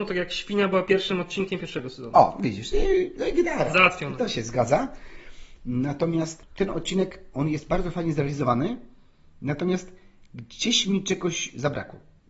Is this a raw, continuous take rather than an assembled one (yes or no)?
yes